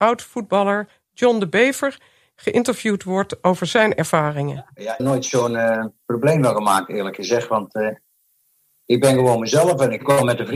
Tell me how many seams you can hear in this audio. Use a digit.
1